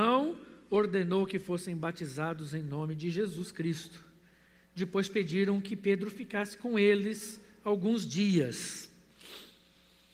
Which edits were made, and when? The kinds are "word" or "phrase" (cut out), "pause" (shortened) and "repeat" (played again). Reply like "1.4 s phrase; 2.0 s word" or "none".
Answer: none